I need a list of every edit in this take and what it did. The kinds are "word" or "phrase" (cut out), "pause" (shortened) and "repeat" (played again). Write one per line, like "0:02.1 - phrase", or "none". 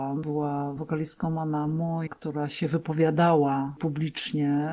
0:02.1 - word